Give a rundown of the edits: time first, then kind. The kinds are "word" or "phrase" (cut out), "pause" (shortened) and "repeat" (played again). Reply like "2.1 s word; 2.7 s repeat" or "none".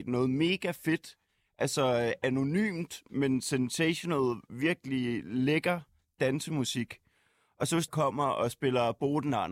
7.9 s phrase